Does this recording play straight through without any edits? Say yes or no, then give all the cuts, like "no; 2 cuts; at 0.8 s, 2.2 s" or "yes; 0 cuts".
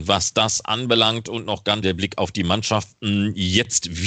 no; 1 cut; at 1.8 s